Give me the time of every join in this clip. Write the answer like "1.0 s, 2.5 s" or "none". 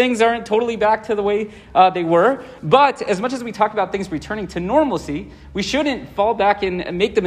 none